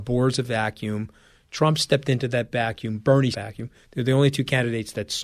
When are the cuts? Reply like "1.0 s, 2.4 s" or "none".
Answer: 3.3 s